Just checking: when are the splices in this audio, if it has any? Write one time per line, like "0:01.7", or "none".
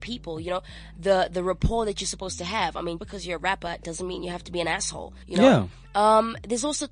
0:03.0
0:05.2